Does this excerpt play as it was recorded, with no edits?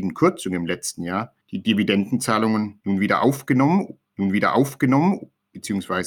no; 2 cuts; at 1.4 s, 4.1 s

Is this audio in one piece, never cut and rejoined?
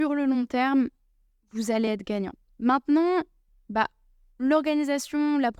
yes; 0 cuts

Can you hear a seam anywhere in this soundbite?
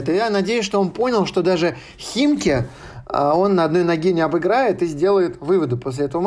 no; 0 cuts

